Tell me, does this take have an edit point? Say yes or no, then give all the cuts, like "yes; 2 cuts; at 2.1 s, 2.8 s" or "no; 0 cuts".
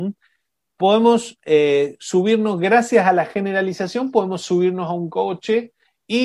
no; 0 cuts